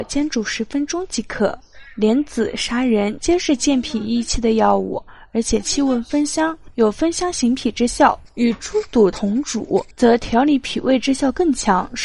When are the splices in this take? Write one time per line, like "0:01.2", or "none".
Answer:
0:09.9